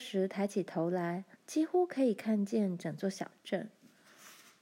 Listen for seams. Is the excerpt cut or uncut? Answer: cut